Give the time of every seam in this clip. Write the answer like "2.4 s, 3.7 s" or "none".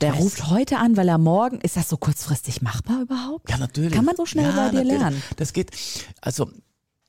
4.2 s